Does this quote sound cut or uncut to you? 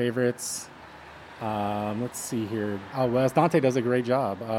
cut